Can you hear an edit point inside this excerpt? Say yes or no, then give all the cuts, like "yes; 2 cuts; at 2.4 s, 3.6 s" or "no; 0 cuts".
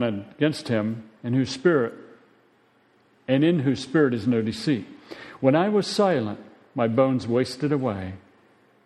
no; 0 cuts